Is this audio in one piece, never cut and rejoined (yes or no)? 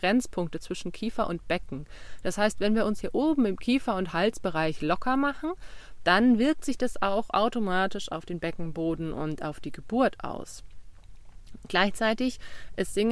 yes